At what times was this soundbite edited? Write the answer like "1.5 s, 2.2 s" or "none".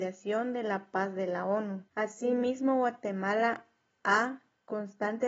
1.9 s